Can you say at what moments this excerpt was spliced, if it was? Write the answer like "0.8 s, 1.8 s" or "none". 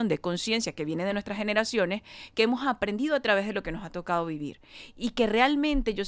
none